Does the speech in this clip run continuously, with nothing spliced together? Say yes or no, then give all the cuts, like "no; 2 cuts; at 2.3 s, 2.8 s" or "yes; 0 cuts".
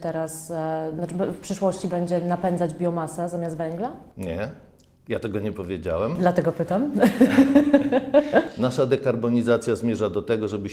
yes; 0 cuts